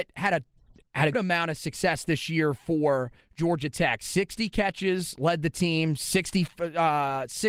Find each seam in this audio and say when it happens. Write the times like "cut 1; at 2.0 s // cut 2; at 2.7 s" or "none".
cut 1; at 1.1 s